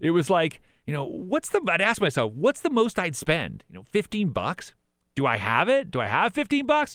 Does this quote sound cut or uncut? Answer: uncut